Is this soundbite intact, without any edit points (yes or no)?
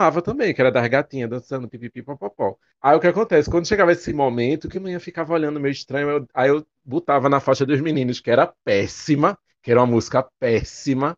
yes